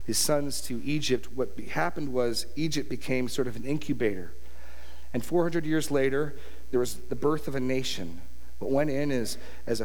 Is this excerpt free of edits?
yes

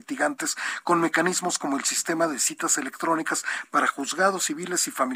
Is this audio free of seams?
yes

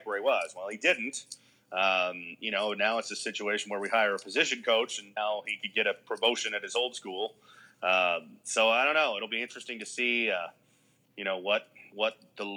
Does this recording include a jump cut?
no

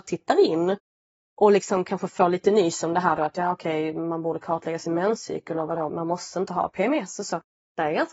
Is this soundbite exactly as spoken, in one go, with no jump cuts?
no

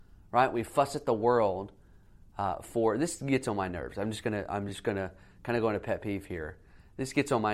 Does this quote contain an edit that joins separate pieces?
no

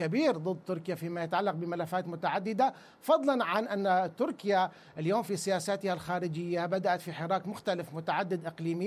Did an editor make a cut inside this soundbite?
no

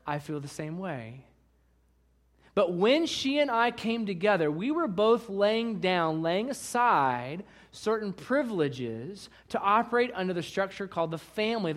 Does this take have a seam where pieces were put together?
no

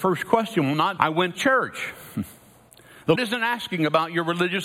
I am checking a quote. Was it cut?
yes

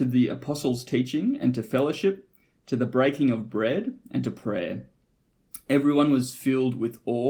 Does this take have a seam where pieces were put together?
no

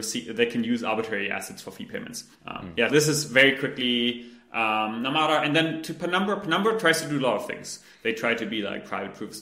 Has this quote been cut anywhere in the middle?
yes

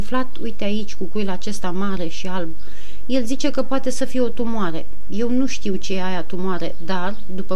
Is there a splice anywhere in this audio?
no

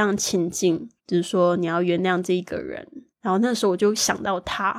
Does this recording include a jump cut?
yes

